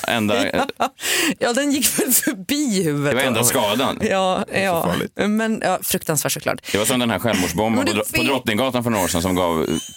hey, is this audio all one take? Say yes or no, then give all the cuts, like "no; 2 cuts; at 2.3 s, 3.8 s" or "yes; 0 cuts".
yes; 0 cuts